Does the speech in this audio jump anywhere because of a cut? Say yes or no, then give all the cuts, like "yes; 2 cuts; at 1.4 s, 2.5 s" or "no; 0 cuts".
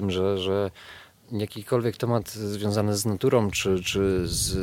no; 0 cuts